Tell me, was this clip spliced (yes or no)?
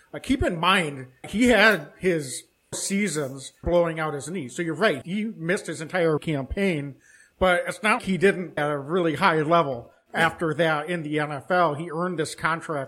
yes